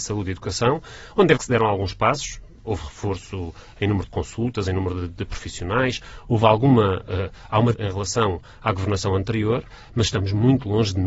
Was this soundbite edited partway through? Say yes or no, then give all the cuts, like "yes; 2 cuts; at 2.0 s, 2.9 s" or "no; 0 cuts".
yes; 2 cuts; at 1.4 s, 7.7 s